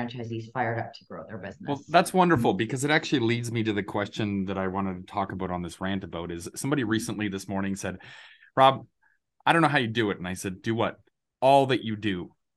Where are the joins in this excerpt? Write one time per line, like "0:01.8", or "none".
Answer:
none